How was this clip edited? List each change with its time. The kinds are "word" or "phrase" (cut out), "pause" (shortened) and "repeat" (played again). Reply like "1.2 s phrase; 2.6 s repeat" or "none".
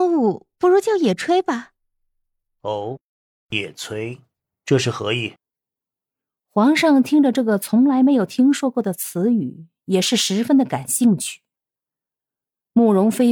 none